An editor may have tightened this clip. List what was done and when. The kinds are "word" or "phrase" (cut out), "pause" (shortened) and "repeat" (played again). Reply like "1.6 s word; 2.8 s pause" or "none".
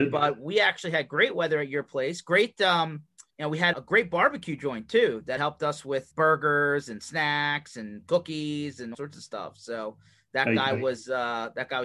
3.3 s pause; 3.7 s word; 5.4 s word; 6.1 s word; 8.9 s word